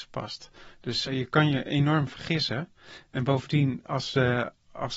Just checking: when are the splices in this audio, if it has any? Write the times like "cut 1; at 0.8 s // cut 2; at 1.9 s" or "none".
cut 1; at 1.0 s